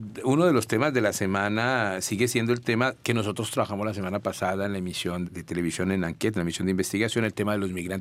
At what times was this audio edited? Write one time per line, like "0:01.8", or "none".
0:05.2